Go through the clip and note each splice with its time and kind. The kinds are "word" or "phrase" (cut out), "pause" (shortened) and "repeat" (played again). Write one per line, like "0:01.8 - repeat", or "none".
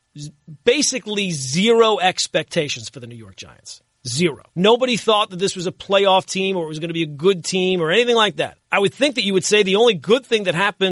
0:04.5 - pause
0:08.6 - pause